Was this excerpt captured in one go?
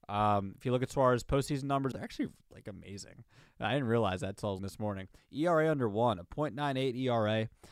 no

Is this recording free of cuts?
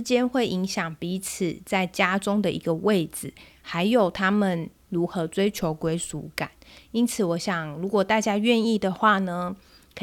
yes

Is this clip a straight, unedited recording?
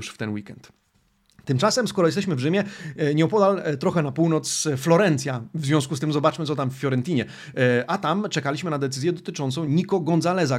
yes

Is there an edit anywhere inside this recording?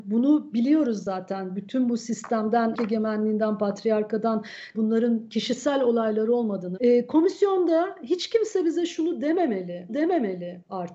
yes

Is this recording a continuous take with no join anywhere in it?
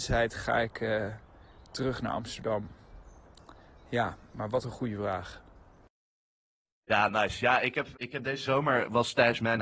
no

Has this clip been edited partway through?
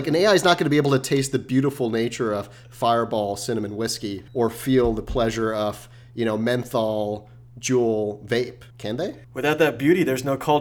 yes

